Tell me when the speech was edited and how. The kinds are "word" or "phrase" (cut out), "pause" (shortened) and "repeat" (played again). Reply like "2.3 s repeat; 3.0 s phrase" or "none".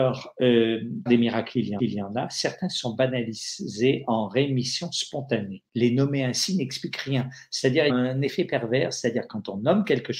1.1 s word; 1.8 s repeat; 5.7 s pause; 7.9 s phrase